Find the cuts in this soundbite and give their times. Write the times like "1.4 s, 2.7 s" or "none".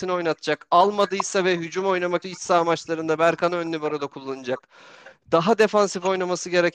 2.2 s